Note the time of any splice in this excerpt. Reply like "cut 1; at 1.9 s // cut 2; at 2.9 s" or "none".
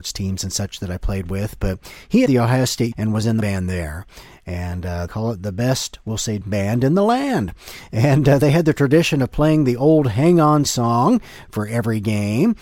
cut 1; at 2.3 s // cut 2; at 2.9 s // cut 3; at 3.4 s // cut 4; at 5.1 s // cut 5; at 6.4 s // cut 6; at 10.7 s